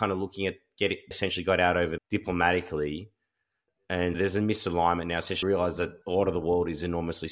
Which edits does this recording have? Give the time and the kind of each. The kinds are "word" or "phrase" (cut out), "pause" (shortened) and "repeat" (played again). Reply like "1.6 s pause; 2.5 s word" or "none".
1.1 s phrase; 2.0 s phrase; 4.1 s word; 5.4 s word; 6.0 s pause